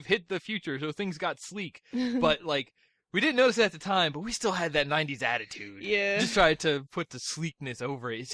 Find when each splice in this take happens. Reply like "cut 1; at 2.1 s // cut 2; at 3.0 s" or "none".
none